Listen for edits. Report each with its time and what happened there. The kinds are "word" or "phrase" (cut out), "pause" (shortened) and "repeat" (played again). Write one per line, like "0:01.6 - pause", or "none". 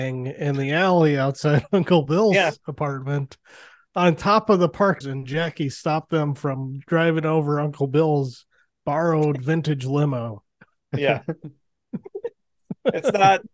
0:05.0 - word